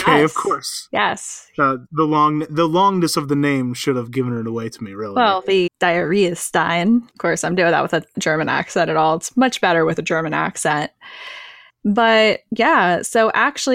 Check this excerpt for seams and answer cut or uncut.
cut